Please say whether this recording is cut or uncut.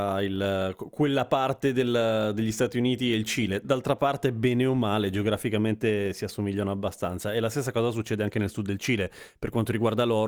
uncut